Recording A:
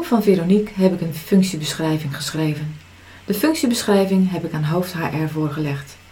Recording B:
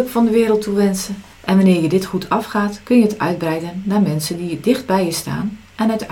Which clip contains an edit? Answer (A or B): B